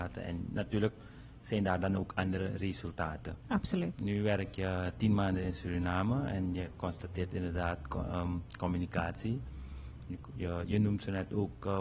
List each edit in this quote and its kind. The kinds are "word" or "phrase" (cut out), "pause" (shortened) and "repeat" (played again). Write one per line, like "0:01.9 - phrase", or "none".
none